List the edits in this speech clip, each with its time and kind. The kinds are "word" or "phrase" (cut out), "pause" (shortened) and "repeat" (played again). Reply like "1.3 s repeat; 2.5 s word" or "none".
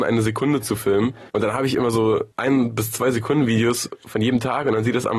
1.3 s pause; 2.3 s pause